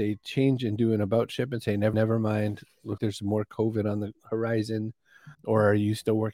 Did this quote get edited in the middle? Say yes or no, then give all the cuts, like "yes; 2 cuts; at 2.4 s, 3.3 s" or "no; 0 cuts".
yes; 3 cuts; at 1.9 s, 3.0 s, 5.3 s